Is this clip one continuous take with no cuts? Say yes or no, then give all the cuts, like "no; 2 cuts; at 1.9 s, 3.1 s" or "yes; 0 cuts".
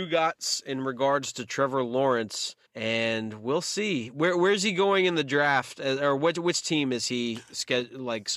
no; 1 cut; at 2.6 s